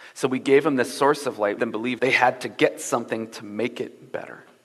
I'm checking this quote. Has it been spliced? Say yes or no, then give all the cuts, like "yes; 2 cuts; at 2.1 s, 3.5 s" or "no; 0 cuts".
yes; 2 cuts; at 1.6 s, 2.0 s